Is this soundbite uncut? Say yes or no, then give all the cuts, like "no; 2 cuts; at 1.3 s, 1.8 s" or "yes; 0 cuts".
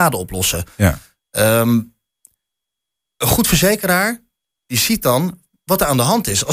yes; 0 cuts